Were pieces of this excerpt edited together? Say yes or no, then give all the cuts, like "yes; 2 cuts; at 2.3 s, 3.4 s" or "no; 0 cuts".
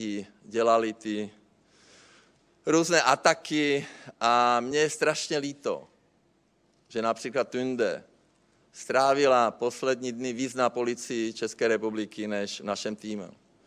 no; 0 cuts